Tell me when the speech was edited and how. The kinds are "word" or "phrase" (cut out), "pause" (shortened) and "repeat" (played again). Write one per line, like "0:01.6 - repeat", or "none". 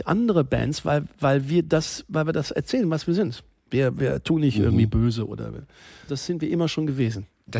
0:06.1 - word